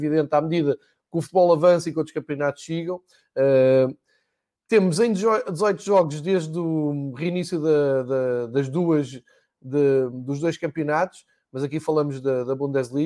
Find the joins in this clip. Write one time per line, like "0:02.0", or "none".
none